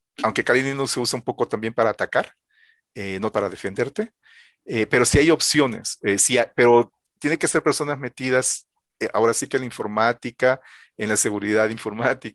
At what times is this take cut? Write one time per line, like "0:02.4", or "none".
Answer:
0:03.3
0:07.1